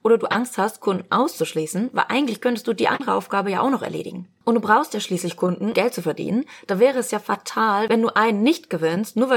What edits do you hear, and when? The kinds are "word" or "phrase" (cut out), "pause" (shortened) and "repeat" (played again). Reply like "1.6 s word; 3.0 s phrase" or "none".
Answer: 5.7 s word